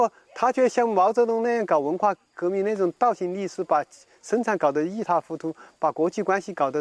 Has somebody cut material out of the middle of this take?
no; 0 cuts

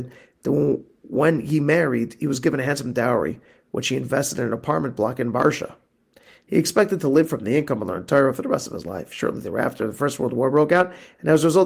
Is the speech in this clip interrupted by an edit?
no; 0 cuts

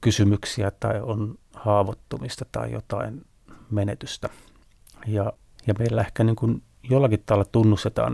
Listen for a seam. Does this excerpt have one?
no; 0 cuts

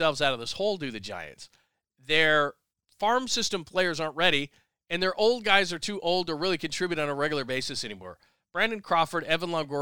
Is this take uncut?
yes; 0 cuts

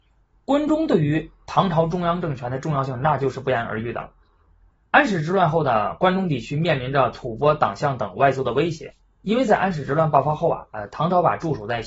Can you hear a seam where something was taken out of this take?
no; 0 cuts

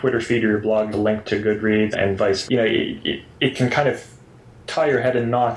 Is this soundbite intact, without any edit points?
no; 5 cuts; at 0.9 s, 1.2 s, 1.9 s, 2.5 s, 3.3 s

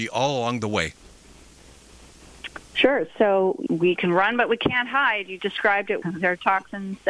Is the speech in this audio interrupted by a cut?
yes; 4 cuts; at 2.6 s, 3.7 s, 5.4 s, 6.0 s

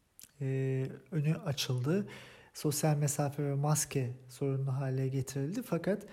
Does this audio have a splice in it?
no; 0 cuts

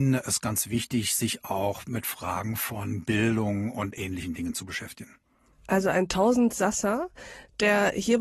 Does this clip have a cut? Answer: no; 0 cuts

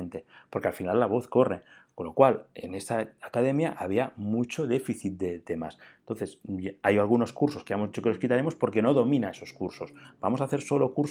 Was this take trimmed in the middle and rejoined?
no; 0 cuts

